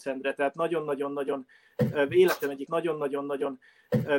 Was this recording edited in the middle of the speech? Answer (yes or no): yes